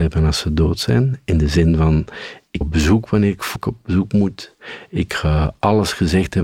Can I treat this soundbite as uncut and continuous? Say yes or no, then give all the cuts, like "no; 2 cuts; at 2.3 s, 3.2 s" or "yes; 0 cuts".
no; 2 cuts; at 2.6 s, 3.6 s